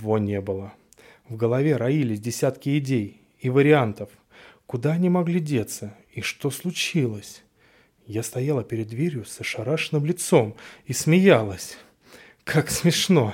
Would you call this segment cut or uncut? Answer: uncut